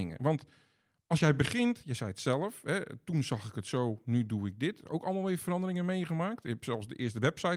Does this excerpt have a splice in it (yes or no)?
no